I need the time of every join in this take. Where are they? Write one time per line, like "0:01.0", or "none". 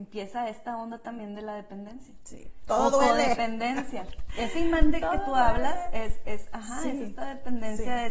none